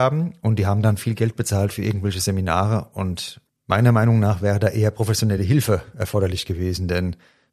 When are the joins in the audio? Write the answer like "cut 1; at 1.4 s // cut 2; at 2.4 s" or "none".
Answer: none